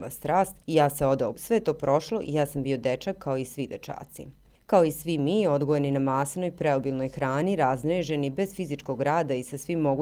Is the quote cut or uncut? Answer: cut